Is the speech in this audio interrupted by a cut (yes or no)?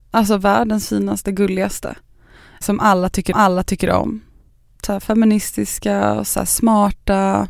yes